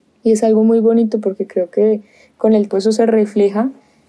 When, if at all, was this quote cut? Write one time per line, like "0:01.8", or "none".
0:02.7